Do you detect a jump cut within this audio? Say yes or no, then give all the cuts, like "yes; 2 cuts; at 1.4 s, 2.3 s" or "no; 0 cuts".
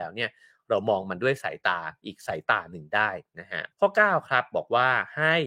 yes; 1 cut; at 3.7 s